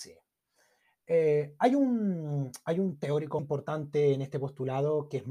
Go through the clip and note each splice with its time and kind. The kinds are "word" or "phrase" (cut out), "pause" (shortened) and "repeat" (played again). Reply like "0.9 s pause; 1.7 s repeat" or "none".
3.4 s word